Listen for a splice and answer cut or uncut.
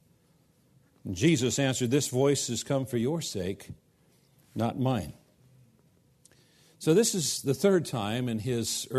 uncut